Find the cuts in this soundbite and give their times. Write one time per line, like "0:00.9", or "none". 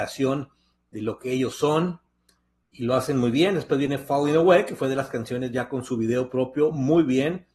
none